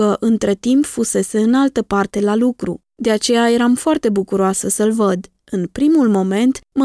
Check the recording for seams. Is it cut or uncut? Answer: cut